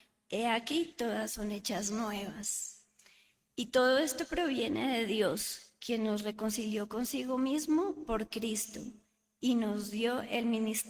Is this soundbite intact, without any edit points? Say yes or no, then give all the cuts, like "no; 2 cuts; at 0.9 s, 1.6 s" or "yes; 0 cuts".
yes; 0 cuts